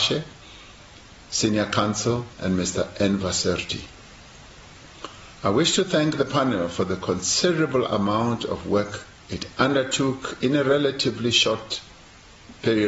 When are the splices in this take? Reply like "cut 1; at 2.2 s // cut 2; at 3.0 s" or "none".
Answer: cut 1; at 2.3 s // cut 2; at 5.3 s // cut 3; at 9.2 s